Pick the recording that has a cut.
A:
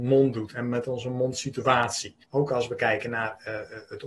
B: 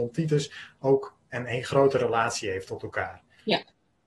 A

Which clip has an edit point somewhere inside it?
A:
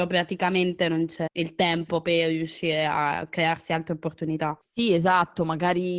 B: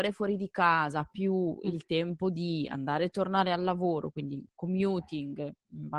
A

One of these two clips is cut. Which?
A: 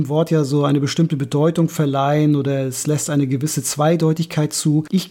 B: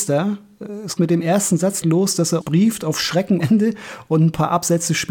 B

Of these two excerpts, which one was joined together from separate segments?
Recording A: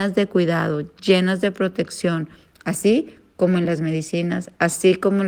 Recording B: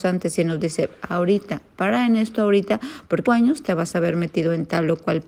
B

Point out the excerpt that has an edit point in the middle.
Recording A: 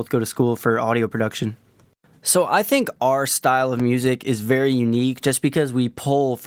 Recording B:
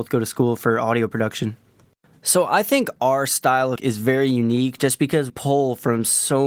B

